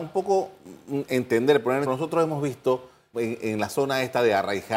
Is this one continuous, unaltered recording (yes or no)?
no